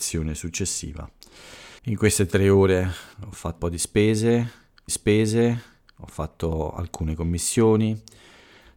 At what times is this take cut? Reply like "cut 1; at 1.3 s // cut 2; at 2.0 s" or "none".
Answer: cut 1; at 1.8 s // cut 2; at 3.1 s // cut 3; at 3.6 s // cut 4; at 4.9 s